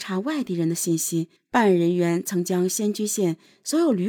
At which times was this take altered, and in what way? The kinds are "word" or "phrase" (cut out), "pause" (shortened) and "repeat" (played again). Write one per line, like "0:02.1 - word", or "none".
0:01.4 - pause